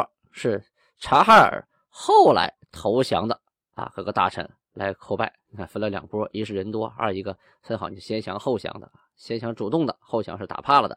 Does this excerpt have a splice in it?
no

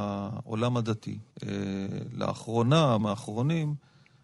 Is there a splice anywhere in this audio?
yes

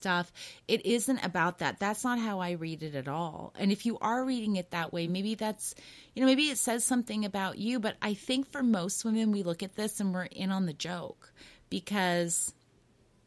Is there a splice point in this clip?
no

